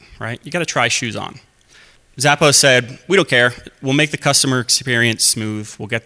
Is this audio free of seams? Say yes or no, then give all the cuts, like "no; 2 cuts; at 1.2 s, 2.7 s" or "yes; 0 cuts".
no; 1 cut; at 2.0 s